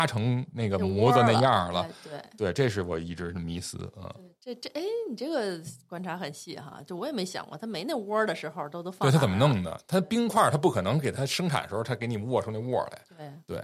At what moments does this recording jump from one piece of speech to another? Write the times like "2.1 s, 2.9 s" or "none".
none